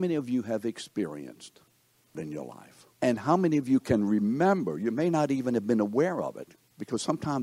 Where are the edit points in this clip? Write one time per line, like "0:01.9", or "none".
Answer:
0:02.1
0:02.9